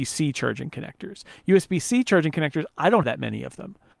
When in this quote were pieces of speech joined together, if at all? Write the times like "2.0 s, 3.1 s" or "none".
3.0 s